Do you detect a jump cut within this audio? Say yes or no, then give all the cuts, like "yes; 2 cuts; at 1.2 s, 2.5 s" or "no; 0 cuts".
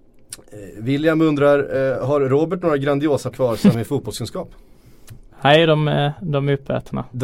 yes; 2 cuts; at 3.3 s, 3.7 s